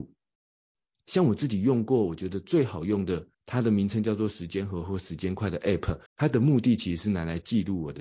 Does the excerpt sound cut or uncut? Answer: cut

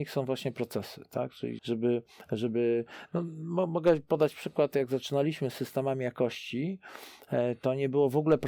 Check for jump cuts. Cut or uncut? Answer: cut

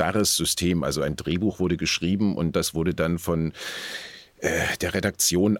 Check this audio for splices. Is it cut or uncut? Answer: uncut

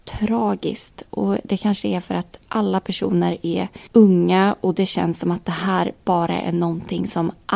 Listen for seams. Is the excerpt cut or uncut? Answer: uncut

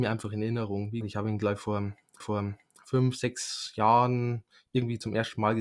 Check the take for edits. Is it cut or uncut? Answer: cut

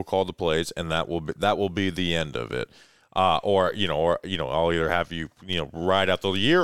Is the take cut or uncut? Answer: uncut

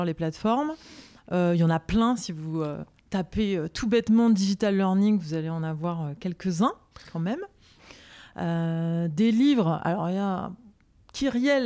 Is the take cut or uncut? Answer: uncut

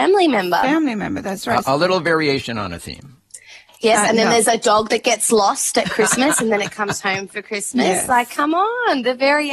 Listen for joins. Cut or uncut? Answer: uncut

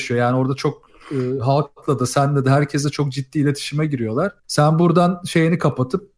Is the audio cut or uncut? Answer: cut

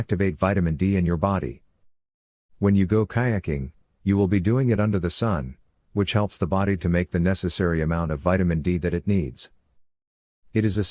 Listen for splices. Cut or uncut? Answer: uncut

